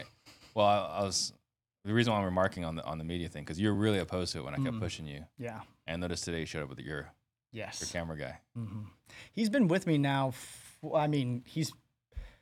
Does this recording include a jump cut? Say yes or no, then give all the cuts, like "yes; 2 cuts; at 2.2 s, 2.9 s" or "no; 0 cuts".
no; 0 cuts